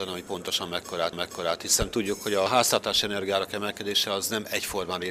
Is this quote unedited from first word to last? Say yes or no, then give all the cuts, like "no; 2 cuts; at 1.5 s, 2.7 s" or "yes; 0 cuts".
no; 1 cut; at 1.1 s